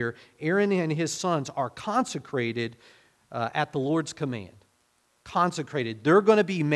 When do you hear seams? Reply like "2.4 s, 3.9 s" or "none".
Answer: none

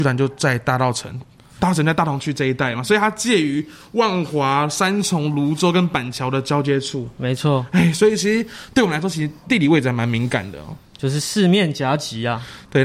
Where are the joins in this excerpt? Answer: none

